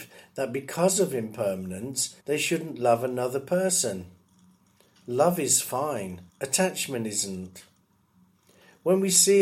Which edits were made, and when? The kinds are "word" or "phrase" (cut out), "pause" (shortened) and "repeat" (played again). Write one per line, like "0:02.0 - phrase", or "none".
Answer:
0:02.2 - pause
0:06.3 - pause